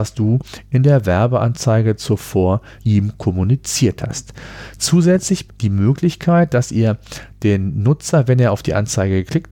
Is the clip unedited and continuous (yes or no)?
no